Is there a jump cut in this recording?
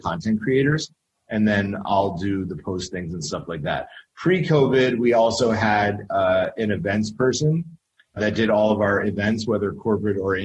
yes; 1 cut; at 8.2 s

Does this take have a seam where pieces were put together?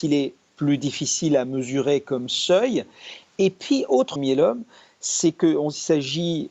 yes; 1 cut; at 4.2 s

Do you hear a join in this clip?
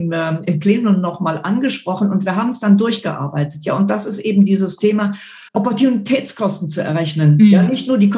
yes; 1 cut; at 5.5 s

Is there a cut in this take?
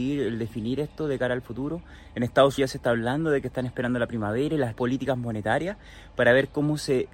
yes; 2 cuts; at 2.6 s, 4.7 s

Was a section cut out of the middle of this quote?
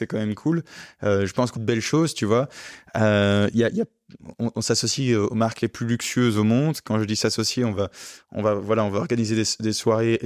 yes; 1 cut; at 1.6 s

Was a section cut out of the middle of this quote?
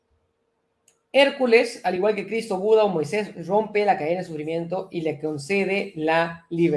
no; 0 cuts

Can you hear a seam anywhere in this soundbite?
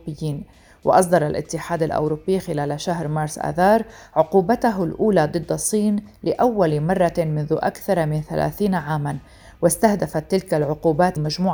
no; 0 cuts

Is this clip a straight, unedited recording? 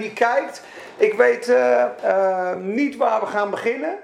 yes; 0 cuts

